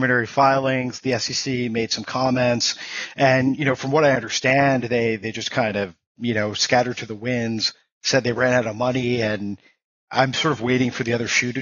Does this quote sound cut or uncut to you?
uncut